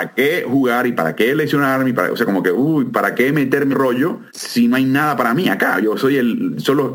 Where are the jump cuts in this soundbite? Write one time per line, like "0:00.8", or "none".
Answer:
0:03.7
0:04.3